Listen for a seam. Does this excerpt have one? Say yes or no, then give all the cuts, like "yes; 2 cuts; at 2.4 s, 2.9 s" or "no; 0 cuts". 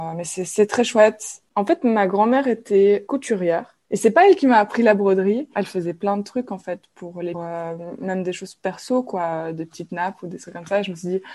yes; 3 cuts; at 3.1 s, 3.8 s, 7.3 s